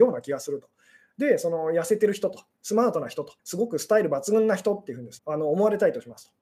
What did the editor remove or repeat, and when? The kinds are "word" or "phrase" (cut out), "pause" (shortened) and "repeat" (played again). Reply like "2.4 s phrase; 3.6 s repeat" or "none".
3.4 s pause; 5.2 s word